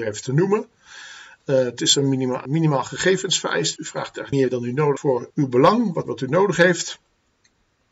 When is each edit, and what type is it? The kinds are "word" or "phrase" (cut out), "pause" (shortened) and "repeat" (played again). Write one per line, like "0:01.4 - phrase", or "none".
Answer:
0:01.8 - word
0:02.5 - word
0:03.8 - word
0:04.3 - word
0:05.0 - word
0:05.3 - word
0:06.0 - word

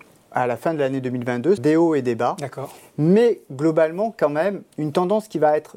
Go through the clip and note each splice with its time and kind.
0:01.6 - word

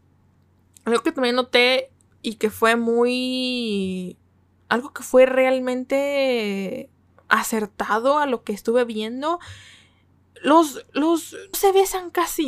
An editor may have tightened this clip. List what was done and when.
0:11.5 - word

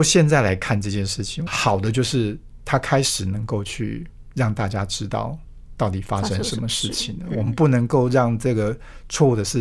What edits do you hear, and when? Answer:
0:01.5 - phrase

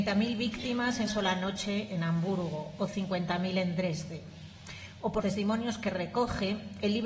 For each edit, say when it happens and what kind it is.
0:01.1 - word
0:05.2 - word

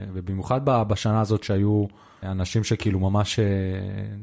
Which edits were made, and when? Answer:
0:02.2 - word

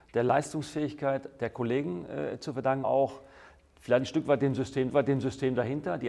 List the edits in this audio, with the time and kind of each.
0:02.8 - word
0:04.9 - repeat

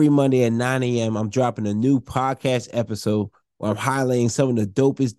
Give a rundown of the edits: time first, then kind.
none

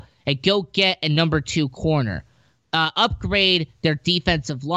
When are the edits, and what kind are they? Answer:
none

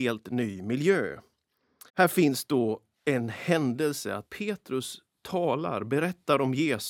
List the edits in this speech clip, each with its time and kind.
0:01.9 - pause
0:04.3 - word

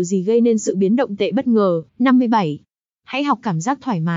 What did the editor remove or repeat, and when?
0:01.2 - word
0:01.9 - pause

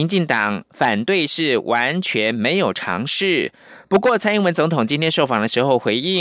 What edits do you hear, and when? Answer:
none

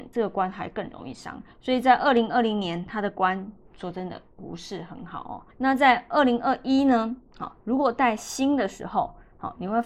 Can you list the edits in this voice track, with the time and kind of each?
0:01.5 - pause
0:05.5 - pause

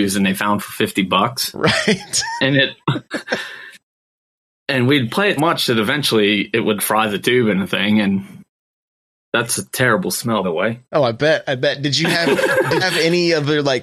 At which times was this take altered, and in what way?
0:05.4 - word
0:06.8 - word
0:10.4 - word
0:12.8 - word

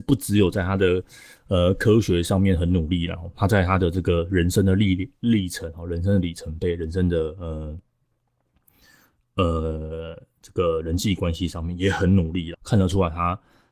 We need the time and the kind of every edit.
0:12.5 - word

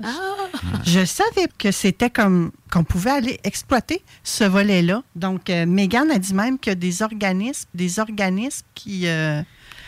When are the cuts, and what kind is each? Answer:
0:01.5 - word
0:02.6 - pause
0:03.4 - word
0:05.1 - pause
0:07.7 - repeat

